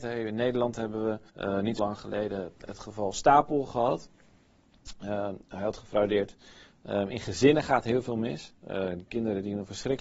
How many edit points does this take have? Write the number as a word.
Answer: two